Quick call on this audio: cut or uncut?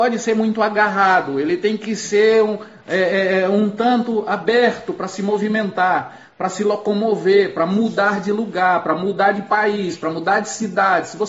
uncut